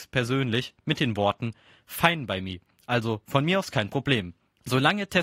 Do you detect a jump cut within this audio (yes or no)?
no